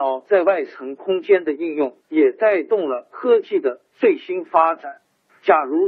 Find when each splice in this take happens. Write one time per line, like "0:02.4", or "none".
0:02.0